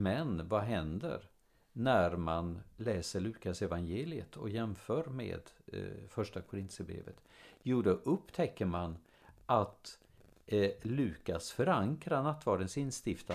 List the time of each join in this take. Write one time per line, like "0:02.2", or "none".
none